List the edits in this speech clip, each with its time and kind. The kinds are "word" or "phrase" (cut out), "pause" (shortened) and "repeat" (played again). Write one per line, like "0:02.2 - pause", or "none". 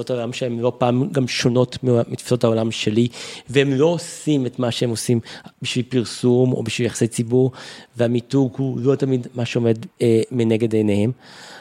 0:05.5 - pause
0:09.9 - pause